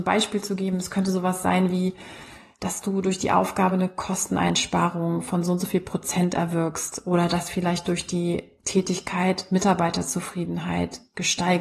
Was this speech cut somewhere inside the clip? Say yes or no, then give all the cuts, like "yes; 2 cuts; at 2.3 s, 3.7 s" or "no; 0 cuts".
no; 0 cuts